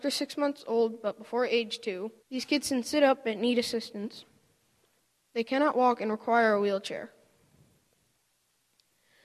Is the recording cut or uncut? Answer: cut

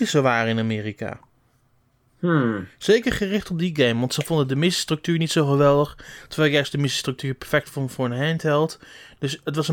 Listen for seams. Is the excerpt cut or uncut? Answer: uncut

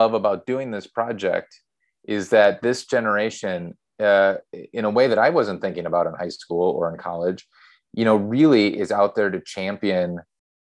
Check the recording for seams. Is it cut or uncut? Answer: uncut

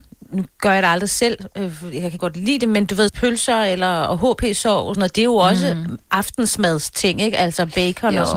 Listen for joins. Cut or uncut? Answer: cut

